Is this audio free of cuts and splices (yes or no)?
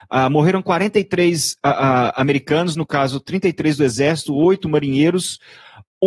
yes